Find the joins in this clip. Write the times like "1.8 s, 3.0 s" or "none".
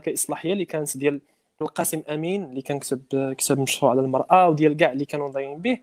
1.6 s